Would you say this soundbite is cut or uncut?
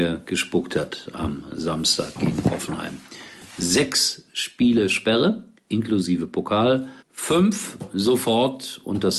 cut